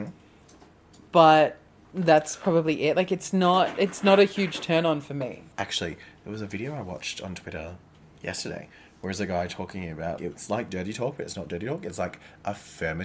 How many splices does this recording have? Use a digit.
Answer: 1